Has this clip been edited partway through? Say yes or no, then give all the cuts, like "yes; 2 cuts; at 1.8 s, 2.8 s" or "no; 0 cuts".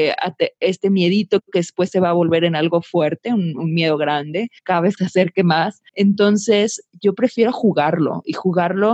yes; 3 cuts; at 4.6 s, 5.0 s, 5.9 s